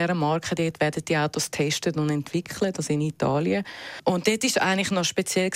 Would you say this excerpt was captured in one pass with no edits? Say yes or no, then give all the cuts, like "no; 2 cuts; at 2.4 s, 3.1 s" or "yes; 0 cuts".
yes; 0 cuts